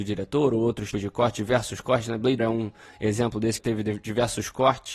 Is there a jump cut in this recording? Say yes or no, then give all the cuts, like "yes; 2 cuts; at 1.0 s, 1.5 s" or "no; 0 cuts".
yes; 3 cuts; at 0.9 s, 2.4 s, 3.6 s